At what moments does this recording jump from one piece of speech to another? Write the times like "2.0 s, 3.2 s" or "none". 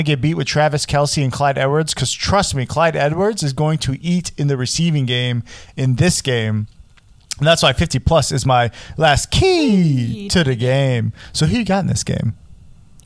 none